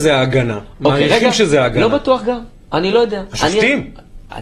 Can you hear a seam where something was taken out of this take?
no; 0 cuts

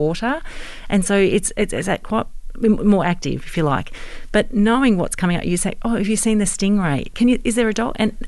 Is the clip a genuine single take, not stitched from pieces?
yes; 0 cuts

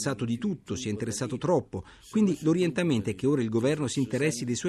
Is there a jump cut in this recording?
no; 0 cuts

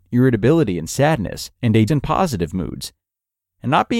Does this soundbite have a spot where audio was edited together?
yes; 2 cuts; at 1.5 s, 1.9 s

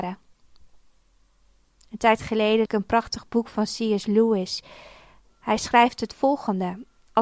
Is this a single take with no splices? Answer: no; 1 cut; at 2.7 s

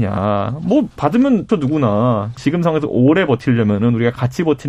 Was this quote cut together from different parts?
yes; 2 cuts; at 1.5 s, 2.4 s

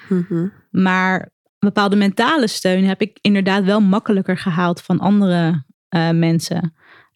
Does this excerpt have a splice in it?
no; 0 cuts

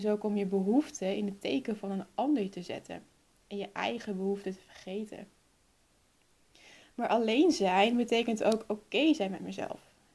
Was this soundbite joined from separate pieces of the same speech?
no; 0 cuts

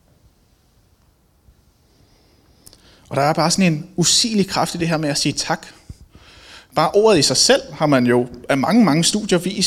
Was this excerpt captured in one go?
yes; 0 cuts

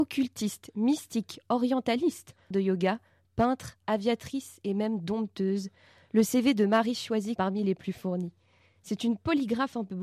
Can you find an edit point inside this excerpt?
yes; 2 cuts; at 2.5 s, 7.4 s

